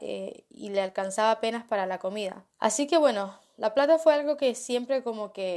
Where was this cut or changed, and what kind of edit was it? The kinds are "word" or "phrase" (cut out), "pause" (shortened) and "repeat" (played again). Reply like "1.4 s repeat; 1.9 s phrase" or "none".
2.5 s pause